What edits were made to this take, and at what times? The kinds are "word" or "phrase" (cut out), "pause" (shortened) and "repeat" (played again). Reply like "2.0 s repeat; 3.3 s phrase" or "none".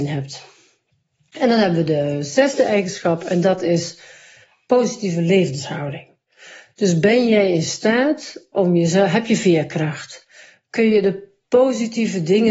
none